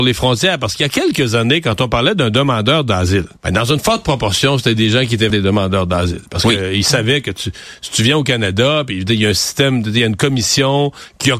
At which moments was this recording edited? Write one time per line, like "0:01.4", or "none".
0:03.4
0:05.3